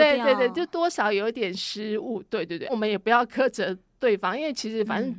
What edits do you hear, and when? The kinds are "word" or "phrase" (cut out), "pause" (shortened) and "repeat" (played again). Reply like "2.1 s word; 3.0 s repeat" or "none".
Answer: 2.7 s word